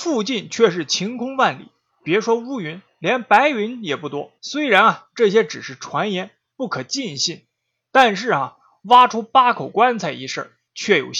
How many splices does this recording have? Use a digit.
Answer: 1